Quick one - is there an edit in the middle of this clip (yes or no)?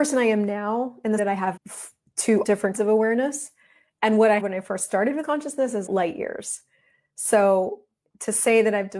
yes